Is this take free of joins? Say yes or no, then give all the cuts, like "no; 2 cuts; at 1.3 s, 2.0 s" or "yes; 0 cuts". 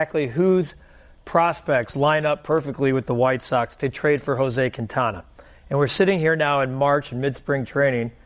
yes; 0 cuts